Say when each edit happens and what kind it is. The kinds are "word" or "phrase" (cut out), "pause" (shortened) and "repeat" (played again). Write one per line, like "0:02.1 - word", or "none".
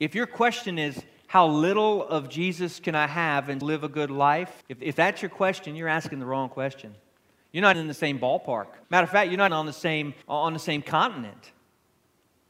0:03.6 - word
0:04.6 - pause
0:07.7 - word
0:08.8 - pause
0:09.5 - word
0:10.2 - pause